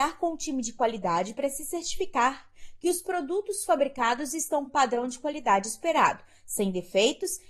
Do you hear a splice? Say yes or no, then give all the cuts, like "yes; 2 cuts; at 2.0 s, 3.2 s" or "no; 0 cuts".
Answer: yes; 1 cut; at 4.7 s